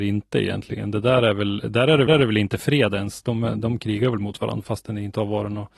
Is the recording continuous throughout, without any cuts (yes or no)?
no